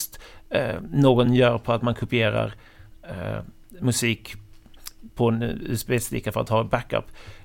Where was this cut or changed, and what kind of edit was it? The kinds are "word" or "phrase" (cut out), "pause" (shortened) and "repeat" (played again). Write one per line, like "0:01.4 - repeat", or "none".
none